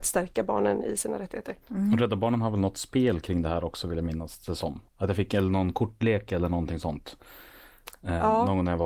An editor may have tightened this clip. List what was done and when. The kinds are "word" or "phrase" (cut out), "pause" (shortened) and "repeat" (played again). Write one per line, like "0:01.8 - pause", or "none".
0:01.6 - pause
0:04.9 - pause